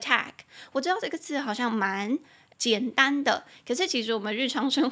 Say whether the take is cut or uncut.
cut